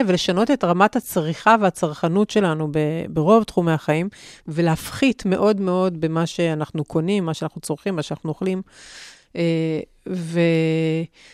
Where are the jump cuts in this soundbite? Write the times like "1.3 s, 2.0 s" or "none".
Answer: none